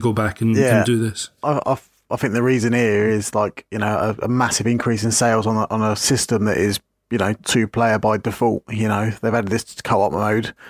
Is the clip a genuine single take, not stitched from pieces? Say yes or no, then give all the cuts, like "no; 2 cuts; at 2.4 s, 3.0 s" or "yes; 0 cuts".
yes; 0 cuts